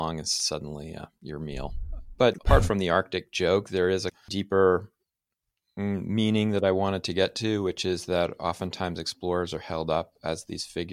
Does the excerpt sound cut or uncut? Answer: uncut